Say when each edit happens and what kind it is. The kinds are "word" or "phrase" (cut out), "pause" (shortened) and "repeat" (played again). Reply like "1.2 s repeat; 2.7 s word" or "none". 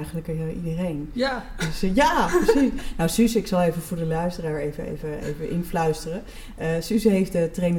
none